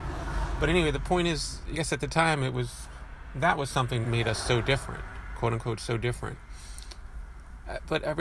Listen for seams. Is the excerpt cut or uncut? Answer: cut